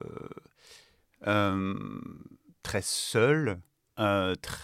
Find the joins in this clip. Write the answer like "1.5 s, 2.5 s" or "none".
none